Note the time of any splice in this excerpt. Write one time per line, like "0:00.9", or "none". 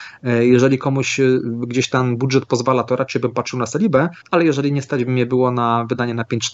0:04.2